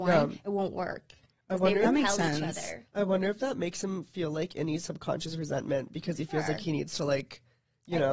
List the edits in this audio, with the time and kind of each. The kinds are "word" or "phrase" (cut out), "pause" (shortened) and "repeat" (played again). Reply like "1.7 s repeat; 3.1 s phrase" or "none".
none